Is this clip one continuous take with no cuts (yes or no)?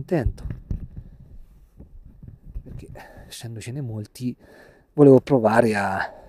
yes